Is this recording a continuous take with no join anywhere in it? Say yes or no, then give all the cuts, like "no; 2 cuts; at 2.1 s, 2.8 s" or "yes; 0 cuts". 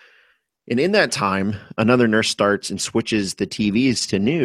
yes; 0 cuts